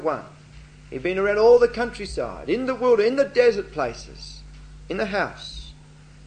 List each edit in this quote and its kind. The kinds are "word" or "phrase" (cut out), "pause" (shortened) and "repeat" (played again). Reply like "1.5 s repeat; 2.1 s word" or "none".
none